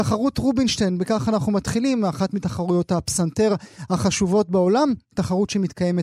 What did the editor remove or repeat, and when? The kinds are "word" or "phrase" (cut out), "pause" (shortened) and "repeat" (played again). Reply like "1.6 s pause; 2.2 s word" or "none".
none